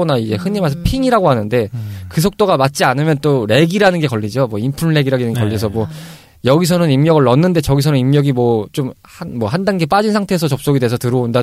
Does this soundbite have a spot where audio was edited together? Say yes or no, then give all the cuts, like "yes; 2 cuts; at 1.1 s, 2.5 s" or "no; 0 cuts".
no; 0 cuts